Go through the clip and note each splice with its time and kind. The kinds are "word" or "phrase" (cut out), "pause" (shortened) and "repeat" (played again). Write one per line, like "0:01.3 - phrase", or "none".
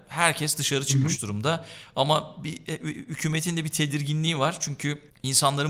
none